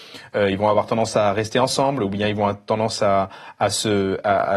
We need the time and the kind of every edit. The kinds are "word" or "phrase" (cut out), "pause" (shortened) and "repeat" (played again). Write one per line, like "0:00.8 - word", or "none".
none

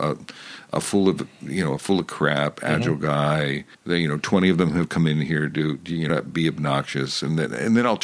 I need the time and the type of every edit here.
0:03.7 - pause
0:06.1 - phrase

